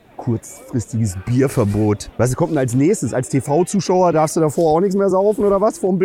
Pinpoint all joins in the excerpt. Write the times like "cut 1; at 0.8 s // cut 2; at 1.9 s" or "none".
none